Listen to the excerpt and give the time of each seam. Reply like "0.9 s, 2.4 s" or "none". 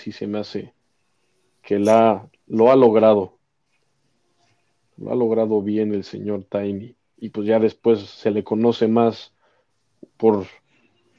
none